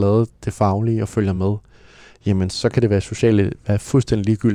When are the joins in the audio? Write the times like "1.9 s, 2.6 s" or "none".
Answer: none